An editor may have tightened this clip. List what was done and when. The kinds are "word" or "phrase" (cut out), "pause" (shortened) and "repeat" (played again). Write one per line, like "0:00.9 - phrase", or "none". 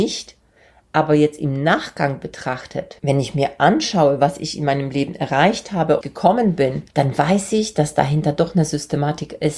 0:03.0 - pause
0:06.0 - phrase
0:06.9 - pause